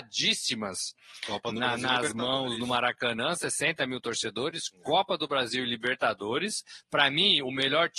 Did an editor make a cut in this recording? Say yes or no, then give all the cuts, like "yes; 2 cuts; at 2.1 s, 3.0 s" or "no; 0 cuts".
no; 0 cuts